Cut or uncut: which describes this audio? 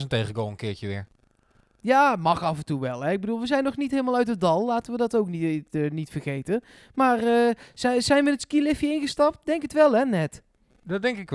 uncut